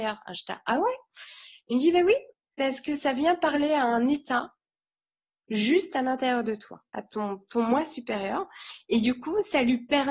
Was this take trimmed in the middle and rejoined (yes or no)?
no